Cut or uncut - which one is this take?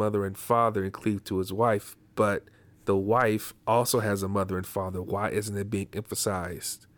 cut